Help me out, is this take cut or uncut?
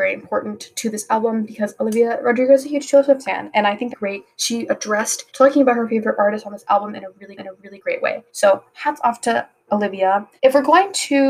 cut